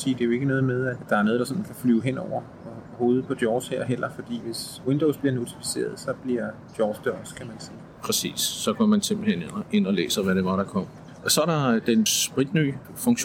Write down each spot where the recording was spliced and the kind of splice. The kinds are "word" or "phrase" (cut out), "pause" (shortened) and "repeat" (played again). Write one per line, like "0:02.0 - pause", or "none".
none